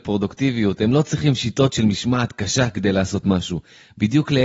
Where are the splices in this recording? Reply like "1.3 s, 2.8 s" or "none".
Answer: none